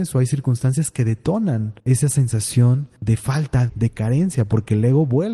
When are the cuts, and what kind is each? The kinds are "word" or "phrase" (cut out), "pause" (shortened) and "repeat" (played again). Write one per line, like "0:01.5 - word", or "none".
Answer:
0:01.8 - pause
0:03.0 - pause
0:03.7 - word